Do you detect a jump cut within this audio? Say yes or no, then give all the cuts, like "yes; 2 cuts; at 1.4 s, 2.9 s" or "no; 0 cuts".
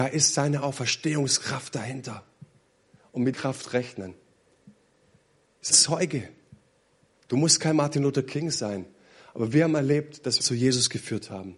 yes; 3 cuts; at 3.3 s, 5.7 s, 10.4 s